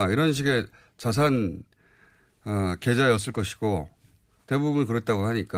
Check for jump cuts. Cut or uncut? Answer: uncut